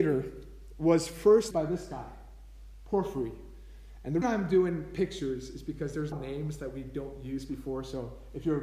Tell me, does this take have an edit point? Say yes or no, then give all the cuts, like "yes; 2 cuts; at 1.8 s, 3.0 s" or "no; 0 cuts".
yes; 3 cuts; at 1.5 s, 4.2 s, 6.1 s